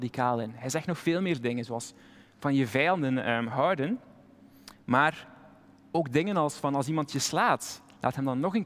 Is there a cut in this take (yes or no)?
no